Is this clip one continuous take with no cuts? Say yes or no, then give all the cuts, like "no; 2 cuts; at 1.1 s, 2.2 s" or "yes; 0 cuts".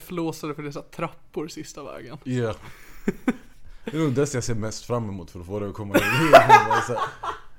yes; 0 cuts